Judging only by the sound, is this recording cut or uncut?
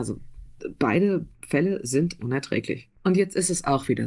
cut